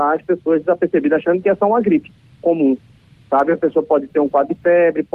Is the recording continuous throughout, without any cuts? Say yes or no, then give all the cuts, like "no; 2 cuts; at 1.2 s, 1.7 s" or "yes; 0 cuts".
yes; 0 cuts